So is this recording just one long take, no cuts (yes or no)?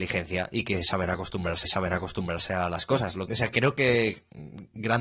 no